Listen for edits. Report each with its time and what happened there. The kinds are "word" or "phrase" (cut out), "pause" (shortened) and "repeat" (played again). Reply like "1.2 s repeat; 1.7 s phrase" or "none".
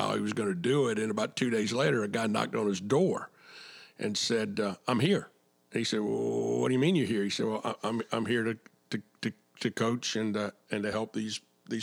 none